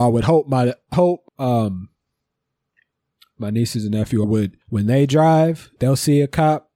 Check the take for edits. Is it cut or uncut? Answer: cut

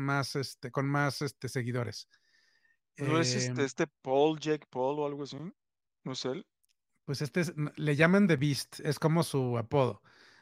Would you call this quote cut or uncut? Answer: uncut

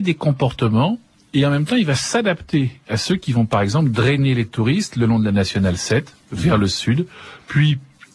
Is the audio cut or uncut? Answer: uncut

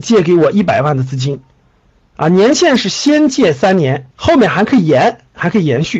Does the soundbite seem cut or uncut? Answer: cut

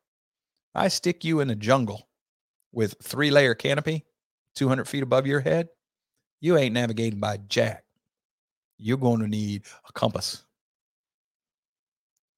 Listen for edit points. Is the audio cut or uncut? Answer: uncut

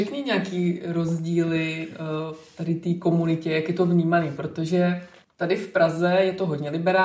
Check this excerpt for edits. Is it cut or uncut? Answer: uncut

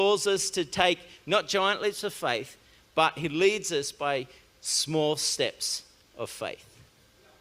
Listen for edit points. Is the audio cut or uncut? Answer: uncut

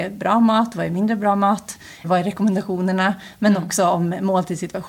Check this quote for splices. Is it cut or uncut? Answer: cut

